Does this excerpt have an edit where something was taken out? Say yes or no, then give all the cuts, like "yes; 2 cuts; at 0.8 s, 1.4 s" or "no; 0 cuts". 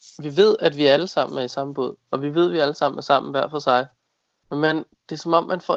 no; 0 cuts